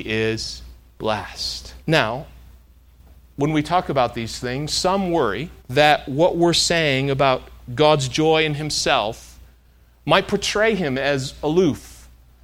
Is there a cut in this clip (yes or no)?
yes